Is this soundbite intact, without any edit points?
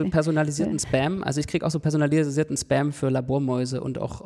yes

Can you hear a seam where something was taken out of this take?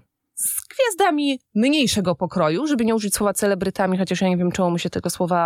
no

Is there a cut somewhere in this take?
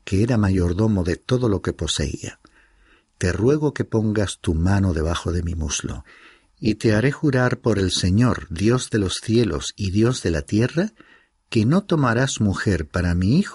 no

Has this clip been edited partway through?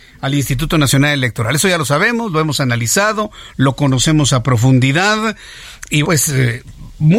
yes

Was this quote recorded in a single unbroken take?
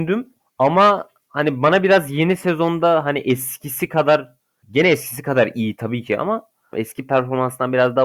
yes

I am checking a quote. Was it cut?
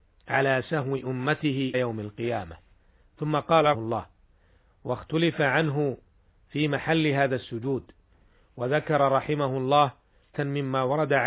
yes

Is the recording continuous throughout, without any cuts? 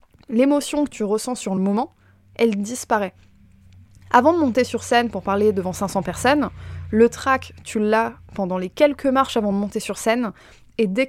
yes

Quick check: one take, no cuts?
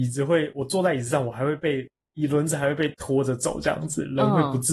yes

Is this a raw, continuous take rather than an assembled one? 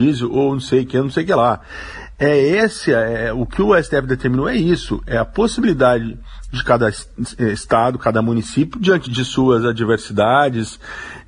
no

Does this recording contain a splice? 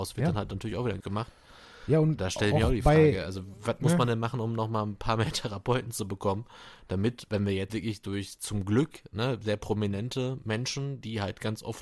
yes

